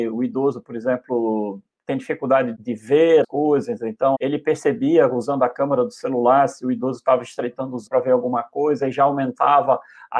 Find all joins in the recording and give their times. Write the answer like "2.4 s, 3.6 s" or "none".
2.5 s, 3.2 s, 4.1 s, 7.9 s